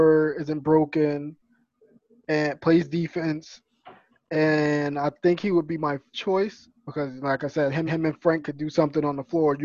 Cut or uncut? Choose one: cut